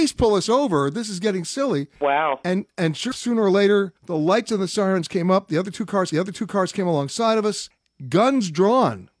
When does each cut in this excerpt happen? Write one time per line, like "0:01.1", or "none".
0:01.9
0:03.1
0:04.0
0:06.1